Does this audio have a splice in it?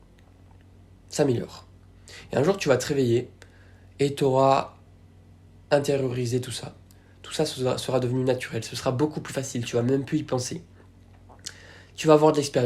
no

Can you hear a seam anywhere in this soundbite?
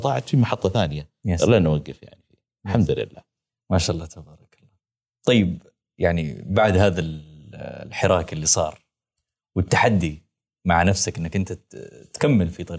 no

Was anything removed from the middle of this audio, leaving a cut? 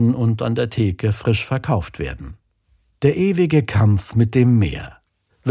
no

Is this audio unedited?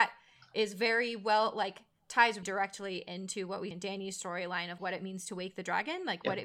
no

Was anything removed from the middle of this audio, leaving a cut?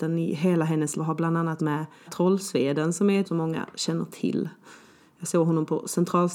yes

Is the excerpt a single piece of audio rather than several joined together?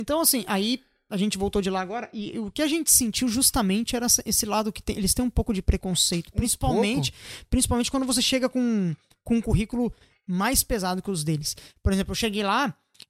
yes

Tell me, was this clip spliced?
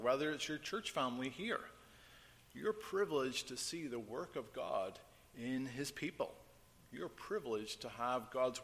no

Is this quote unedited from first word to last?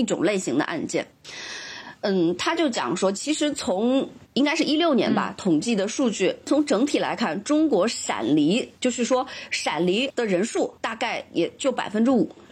no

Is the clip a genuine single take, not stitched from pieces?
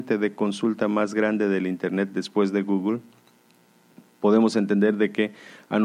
yes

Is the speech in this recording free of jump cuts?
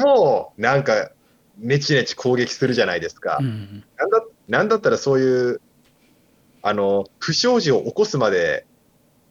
no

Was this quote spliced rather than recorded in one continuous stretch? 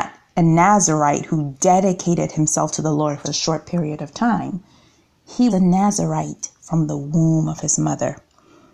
yes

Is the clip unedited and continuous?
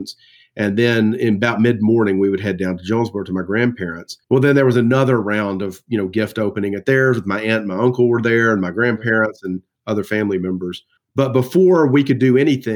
no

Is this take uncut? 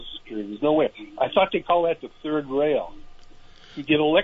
yes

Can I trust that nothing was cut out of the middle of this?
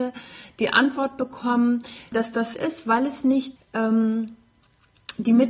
no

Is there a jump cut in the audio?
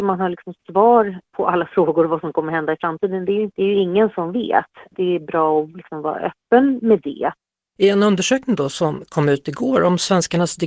no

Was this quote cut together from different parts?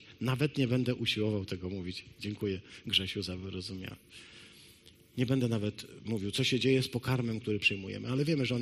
no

